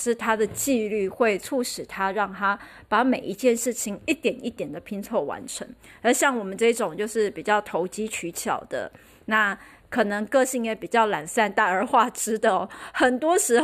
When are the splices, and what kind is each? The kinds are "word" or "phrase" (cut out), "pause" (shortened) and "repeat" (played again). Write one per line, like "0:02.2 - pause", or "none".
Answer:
none